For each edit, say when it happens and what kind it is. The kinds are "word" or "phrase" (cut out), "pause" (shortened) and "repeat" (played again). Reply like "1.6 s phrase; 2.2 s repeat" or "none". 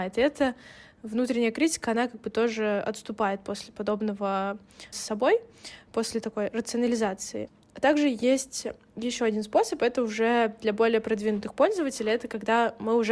4.9 s word